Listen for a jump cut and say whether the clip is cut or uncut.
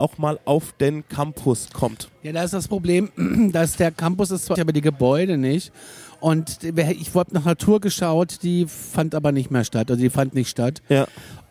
cut